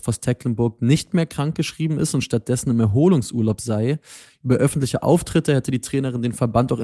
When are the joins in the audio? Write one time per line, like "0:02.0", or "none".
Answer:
none